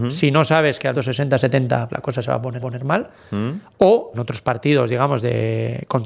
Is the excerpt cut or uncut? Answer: cut